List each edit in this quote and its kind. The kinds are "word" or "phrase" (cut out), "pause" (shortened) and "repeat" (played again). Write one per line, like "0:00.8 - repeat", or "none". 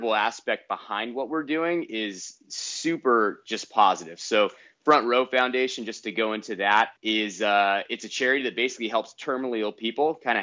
0:07.0 - pause